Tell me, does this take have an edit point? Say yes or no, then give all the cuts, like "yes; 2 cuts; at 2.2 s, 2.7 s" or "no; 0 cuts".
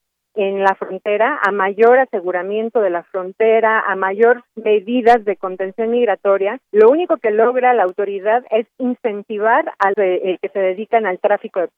yes; 3 cuts; at 4.5 s, 6.6 s, 9.9 s